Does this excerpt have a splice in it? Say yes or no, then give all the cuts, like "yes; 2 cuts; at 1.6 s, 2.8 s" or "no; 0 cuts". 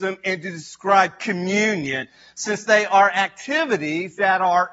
no; 0 cuts